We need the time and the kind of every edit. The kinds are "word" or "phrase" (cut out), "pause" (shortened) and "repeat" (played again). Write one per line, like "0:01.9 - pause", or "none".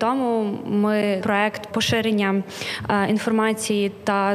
0:01.2 - word
0:01.7 - word